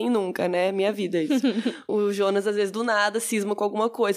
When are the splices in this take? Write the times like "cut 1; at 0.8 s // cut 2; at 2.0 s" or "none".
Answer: cut 1; at 1.9 s